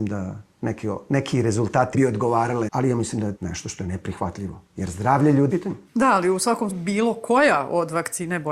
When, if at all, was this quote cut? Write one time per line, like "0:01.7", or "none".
0:01.9
0:02.7
0:03.4
0:05.5
0:06.7